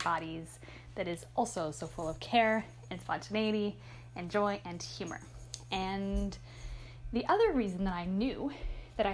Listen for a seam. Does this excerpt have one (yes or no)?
no